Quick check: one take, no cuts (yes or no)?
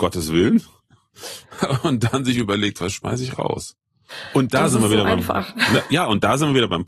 yes